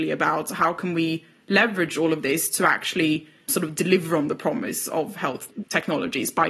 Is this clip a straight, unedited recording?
yes; 0 cuts

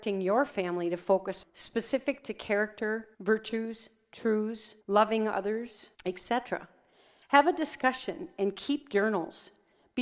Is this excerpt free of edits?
no; 4 cuts; at 1.4 s, 3.1 s, 4.8 s, 5.9 s

